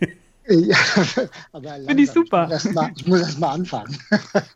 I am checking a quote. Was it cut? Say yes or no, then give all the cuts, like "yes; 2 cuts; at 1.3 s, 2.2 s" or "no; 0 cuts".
no; 0 cuts